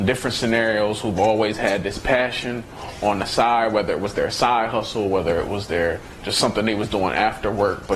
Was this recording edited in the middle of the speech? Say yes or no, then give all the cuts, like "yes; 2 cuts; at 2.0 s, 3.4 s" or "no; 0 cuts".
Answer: no; 0 cuts